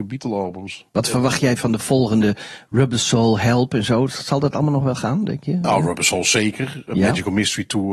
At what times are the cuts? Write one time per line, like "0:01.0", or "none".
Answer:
none